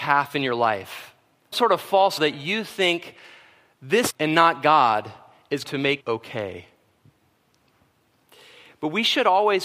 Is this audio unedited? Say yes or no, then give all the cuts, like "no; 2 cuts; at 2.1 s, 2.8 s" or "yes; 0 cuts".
no; 5 cuts; at 1.5 s, 2.2 s, 4.1 s, 5.6 s, 6.0 s